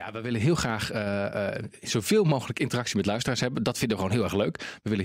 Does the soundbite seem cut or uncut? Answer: uncut